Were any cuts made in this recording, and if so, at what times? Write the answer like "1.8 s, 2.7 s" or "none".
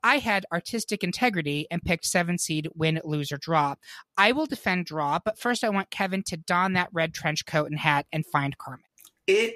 none